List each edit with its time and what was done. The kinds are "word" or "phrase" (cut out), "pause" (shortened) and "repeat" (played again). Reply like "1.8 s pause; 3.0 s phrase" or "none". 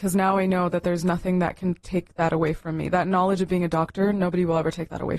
none